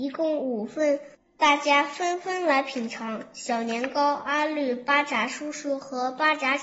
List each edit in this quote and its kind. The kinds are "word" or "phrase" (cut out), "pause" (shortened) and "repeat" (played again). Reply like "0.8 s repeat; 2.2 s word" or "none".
1.1 s pause

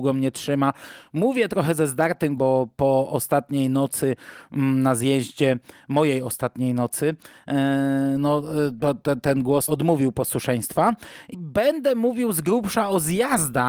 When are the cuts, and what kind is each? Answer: 2.4 s word; 9.7 s word; 11.3 s word

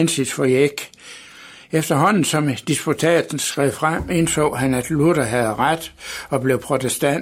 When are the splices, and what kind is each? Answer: none

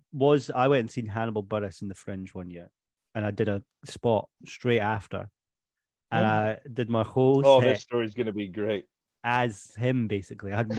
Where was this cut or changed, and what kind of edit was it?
none

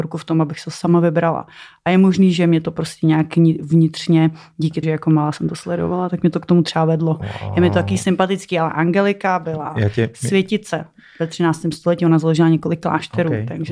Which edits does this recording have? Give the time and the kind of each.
4.8 s word

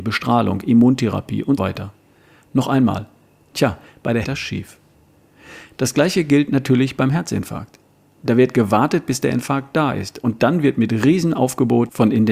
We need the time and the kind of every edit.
1.6 s word; 4.2 s phrase

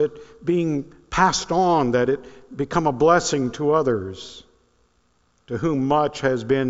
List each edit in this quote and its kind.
none

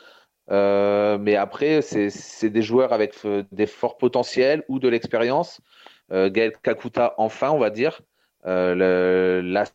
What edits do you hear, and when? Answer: none

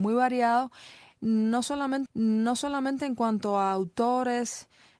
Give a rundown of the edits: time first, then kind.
2.1 s repeat

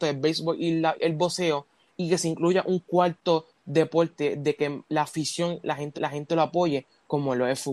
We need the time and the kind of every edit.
0.9 s word; 5.9 s repeat

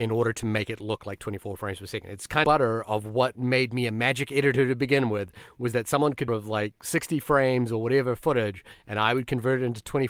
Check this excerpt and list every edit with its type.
2.4 s phrase; 6.3 s phrase

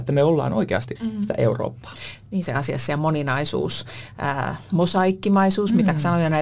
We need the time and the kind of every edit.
1.0 s word; 2.5 s phrase

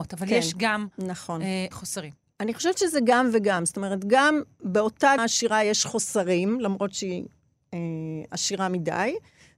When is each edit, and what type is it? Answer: 1.7 s word; 5.2 s word

